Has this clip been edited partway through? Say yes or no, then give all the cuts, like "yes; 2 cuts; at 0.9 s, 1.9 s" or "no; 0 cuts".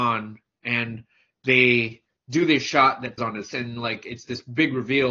yes; 2 cuts; at 3.2 s, 3.5 s